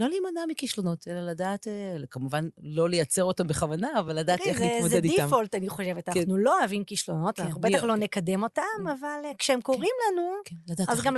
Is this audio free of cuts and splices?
yes; 0 cuts

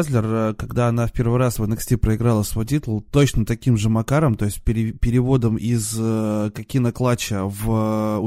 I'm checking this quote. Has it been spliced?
no; 0 cuts

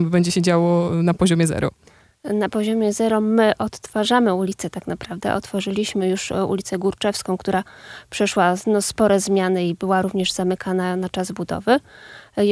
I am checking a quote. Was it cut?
no; 0 cuts

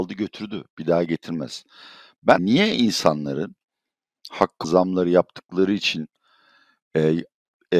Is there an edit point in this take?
yes; 3 cuts; at 1.1 s, 2.4 s, 4.6 s

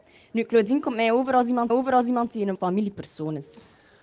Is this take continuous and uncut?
no; 2 cuts; at 1.7 s, 2.5 s

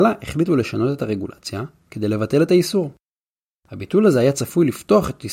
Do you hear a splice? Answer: no; 0 cuts

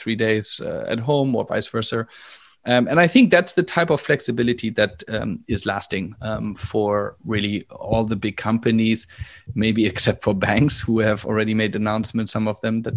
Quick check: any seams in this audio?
no; 0 cuts

